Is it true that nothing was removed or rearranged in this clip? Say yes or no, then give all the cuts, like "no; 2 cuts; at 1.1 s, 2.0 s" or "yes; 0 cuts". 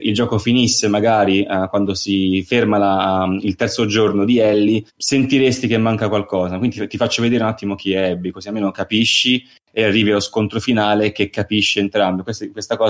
no; 1 cut; at 4.9 s